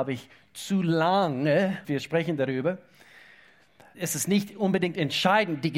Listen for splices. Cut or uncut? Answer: cut